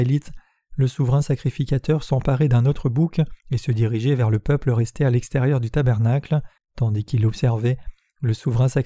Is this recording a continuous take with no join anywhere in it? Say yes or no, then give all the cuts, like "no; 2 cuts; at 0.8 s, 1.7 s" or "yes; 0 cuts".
no; 2 cuts; at 3.4 s, 6.6 s